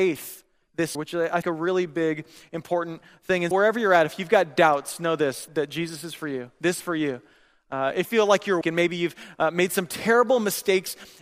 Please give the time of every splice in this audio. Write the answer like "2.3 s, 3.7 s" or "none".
0.9 s, 1.4 s, 3.5 s, 5.5 s, 6.8 s, 8.0 s, 8.6 s